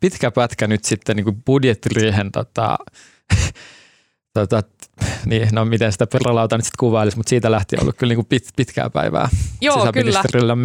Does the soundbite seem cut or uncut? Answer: uncut